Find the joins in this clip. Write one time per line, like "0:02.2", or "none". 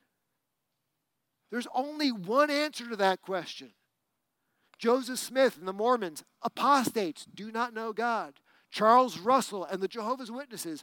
none